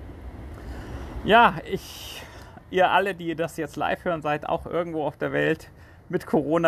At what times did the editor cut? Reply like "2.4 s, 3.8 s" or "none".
none

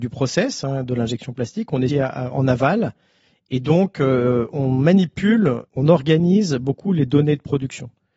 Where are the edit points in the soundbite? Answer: 1.9 s, 5.7 s

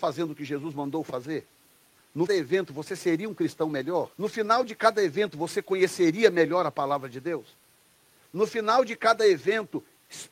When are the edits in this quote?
2.3 s, 4.1 s

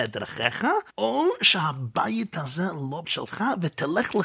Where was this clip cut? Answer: 0.9 s, 3.0 s

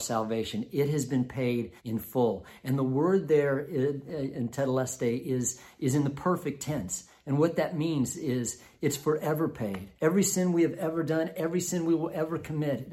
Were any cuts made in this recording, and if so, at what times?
1.8 s, 10.0 s

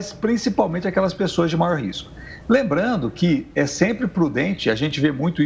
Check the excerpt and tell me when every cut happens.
none

